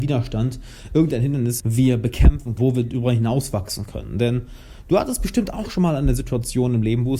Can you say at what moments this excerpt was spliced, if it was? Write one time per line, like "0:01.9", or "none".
0:01.6
0:02.6